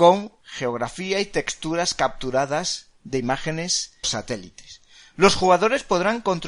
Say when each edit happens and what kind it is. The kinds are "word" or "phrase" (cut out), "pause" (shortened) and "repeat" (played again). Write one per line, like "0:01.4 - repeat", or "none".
0:04.0 - word